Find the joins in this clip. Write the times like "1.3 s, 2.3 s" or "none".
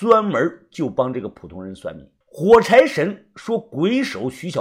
2.2 s